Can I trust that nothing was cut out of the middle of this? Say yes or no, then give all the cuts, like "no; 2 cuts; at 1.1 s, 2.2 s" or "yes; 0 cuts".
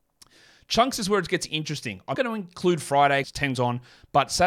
no; 3 cuts; at 2.1 s, 3.2 s, 3.5 s